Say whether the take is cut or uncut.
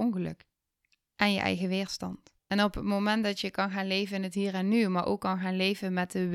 cut